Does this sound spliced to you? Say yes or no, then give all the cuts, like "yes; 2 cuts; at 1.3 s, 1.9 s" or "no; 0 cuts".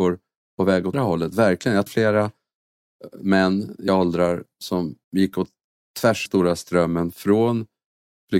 yes; 5 cuts; at 0.9 s, 1.9 s, 3.9 s, 5.0 s, 6.3 s